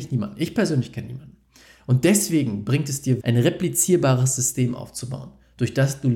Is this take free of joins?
no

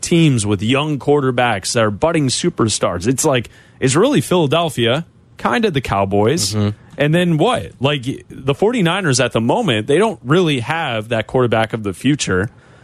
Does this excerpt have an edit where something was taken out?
no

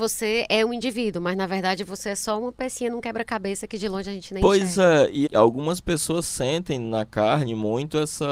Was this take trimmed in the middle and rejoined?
yes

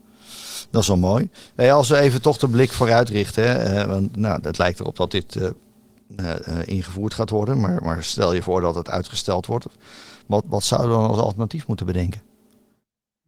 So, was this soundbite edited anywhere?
no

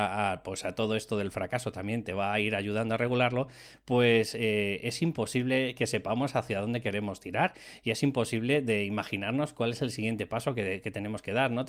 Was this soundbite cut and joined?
no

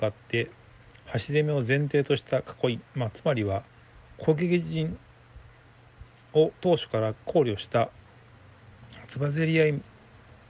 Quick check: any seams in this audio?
yes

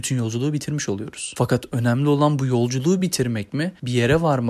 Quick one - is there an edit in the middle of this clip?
no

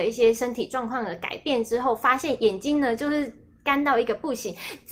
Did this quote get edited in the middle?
no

